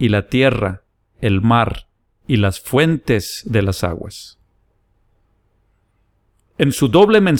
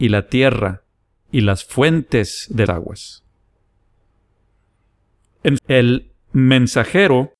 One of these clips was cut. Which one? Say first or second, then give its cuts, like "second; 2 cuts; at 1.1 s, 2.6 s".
second; 3 cuts; at 1.1 s, 2.7 s, 5.6 s